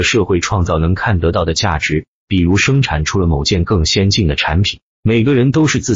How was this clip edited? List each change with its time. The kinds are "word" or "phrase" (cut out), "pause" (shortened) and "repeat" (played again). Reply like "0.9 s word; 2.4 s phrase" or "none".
4.9 s pause